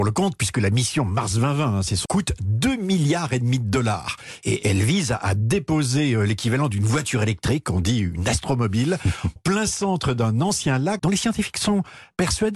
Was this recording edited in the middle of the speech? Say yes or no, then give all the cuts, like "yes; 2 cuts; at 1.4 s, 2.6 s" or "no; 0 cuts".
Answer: yes; 3 cuts; at 2.0 s, 9.4 s, 11.0 s